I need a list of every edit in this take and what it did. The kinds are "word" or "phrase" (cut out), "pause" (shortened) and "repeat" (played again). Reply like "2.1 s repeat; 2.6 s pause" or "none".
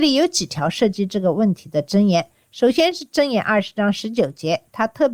none